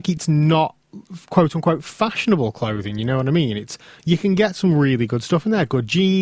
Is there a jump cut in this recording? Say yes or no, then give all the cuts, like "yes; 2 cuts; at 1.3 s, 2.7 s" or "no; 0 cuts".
no; 0 cuts